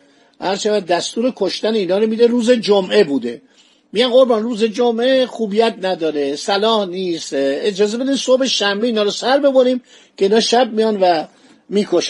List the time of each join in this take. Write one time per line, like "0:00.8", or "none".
none